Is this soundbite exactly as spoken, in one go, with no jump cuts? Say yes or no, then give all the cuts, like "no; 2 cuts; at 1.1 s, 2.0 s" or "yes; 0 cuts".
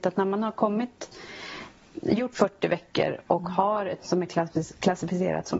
no; 2 cuts; at 2.3 s, 4.0 s